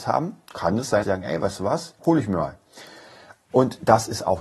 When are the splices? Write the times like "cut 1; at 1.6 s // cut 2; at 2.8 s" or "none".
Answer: cut 1; at 1.0 s // cut 2; at 2.0 s